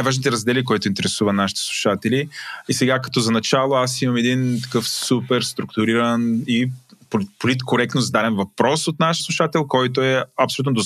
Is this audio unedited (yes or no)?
no